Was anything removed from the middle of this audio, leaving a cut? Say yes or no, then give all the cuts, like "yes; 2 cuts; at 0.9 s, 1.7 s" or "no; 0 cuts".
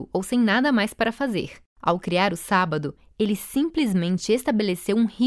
yes; 1 cut; at 1.7 s